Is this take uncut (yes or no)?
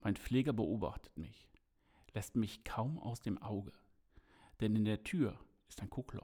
yes